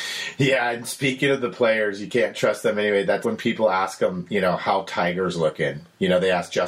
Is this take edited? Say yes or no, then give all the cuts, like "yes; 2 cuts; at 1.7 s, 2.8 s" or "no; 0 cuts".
yes; 1 cut; at 3.2 s